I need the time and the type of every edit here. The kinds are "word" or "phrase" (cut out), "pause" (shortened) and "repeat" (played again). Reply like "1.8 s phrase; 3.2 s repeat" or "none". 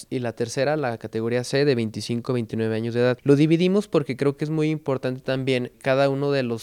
none